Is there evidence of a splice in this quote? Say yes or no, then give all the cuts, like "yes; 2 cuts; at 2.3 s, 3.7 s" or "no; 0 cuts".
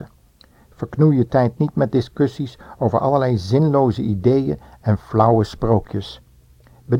no; 0 cuts